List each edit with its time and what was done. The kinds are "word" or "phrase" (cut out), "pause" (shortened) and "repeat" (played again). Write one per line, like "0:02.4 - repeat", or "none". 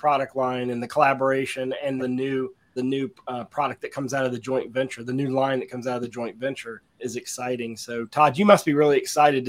0:02.0 - word
0:02.8 - word
0:07.0 - word